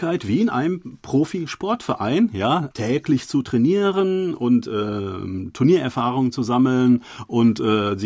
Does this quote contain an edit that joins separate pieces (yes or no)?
yes